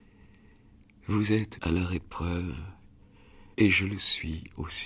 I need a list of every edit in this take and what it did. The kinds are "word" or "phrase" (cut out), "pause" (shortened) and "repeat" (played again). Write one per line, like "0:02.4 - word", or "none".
0:01.6 - word
0:03.5 - pause